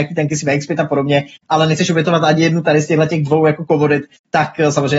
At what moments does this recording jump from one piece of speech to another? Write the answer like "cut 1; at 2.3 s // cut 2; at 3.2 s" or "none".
none